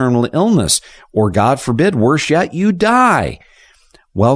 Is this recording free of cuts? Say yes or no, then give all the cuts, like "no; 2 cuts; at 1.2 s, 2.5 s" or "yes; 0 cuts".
yes; 0 cuts